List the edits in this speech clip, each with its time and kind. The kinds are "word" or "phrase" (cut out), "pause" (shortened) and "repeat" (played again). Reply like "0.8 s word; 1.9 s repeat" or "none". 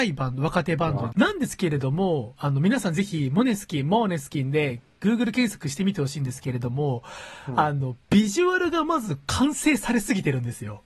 1.1 s phrase; 8.0 s pause

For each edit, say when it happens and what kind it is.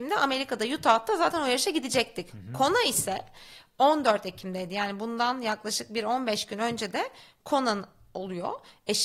none

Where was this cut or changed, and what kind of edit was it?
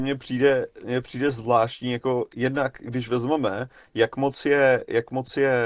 none

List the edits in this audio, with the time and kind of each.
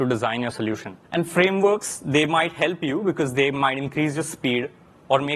1.0 s pause

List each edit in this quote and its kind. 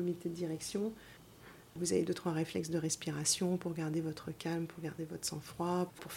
none

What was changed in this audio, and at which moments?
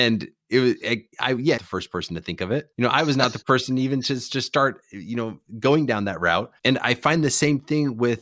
1.1 s pause; 1.6 s phrase; 2.7 s pause; 3.4 s word; 6.6 s pause

